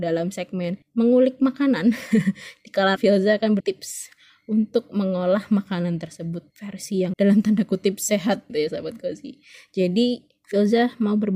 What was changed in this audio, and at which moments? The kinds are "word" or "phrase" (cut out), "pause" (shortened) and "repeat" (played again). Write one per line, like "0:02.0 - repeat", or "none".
0:03.0 - word
0:03.6 - word
0:06.5 - word
0:07.1 - word
0:08.5 - word